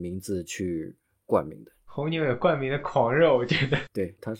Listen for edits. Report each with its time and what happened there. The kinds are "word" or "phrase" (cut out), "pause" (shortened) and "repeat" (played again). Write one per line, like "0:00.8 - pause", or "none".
none